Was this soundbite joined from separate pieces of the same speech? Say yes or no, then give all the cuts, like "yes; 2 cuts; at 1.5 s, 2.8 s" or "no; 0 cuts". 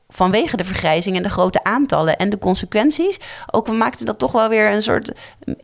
no; 0 cuts